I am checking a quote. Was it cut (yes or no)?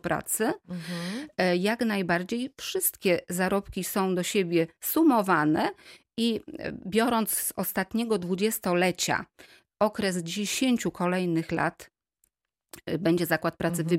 no